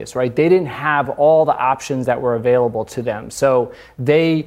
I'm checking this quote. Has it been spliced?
no; 0 cuts

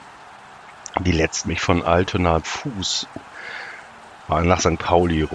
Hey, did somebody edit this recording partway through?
yes; 2 cuts; at 1.5 s, 2.4 s

